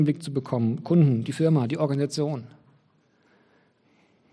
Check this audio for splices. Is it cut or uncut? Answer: uncut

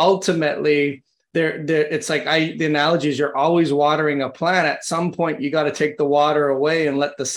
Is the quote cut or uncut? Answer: uncut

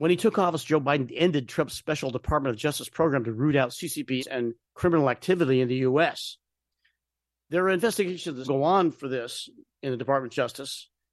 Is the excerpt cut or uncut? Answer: cut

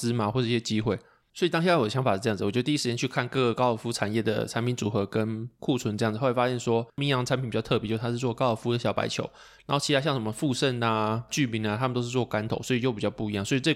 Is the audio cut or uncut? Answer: cut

